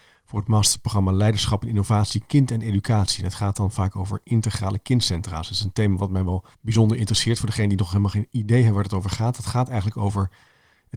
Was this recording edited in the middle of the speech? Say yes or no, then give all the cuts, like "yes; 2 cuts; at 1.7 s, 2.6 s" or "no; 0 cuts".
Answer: yes; 1 cut; at 6.5 s